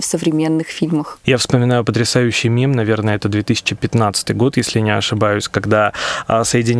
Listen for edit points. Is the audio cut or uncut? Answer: uncut